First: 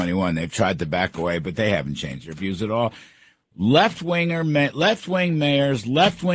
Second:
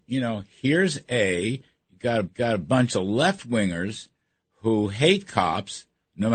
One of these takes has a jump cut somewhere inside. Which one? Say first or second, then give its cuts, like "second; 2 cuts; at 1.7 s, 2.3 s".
second; 1 cut; at 2.2 s